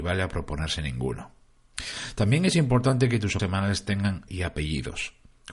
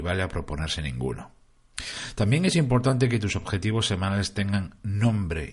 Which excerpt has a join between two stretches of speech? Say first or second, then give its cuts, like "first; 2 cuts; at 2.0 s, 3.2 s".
first; 2 cuts; at 3.4 s, 4.3 s